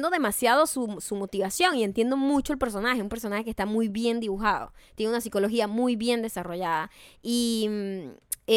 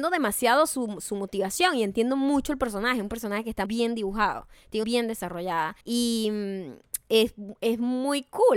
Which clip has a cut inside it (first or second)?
second